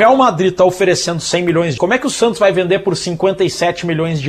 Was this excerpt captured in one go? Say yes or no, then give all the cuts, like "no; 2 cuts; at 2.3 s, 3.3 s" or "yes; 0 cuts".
no; 1 cut; at 1.8 s